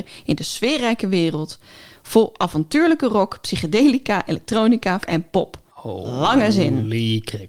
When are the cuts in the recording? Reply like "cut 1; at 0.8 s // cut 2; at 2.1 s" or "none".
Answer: cut 1; at 5.0 s // cut 2; at 5.7 s